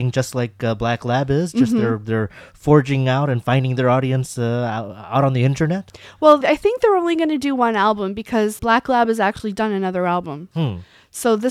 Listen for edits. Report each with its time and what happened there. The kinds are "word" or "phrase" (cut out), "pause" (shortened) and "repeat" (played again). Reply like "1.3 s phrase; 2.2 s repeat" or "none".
6.4 s word; 8.6 s word